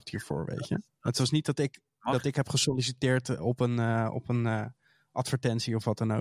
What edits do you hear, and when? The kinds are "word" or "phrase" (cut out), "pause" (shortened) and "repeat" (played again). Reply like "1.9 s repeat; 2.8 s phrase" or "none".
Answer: none